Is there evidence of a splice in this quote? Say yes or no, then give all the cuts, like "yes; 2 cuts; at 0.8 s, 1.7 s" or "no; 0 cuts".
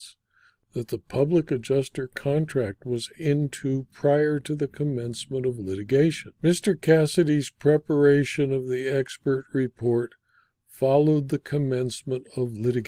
yes; 2 cuts; at 3.1 s, 6.4 s